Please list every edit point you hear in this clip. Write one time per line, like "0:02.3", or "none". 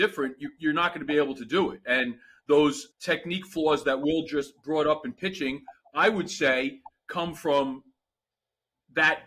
0:02.9